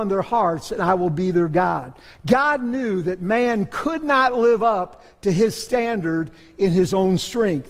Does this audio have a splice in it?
no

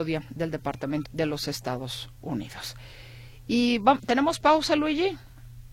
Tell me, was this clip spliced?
yes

